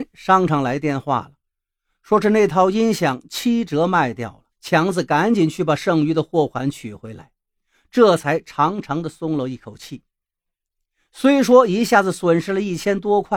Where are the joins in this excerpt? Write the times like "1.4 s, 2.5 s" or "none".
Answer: 4.5 s